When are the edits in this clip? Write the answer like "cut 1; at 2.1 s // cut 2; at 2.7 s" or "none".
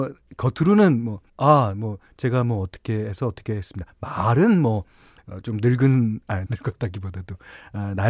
cut 1; at 1.3 s // cut 2; at 6.5 s